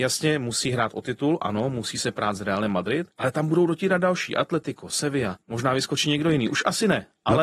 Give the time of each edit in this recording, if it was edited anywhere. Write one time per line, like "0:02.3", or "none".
0:03.1
0:05.4